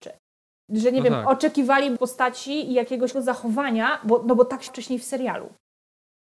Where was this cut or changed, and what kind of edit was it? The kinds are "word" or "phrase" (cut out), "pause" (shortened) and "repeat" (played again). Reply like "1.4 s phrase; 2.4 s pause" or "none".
2.0 s word; 3.1 s word; 4.7 s word